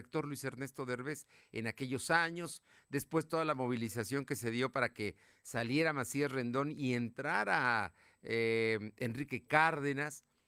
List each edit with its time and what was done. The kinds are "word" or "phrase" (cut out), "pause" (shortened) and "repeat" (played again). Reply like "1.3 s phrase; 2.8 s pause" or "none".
none